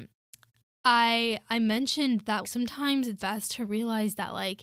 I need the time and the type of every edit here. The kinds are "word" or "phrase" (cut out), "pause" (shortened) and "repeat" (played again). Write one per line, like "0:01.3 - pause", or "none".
0:02.4 - word
0:03.2 - word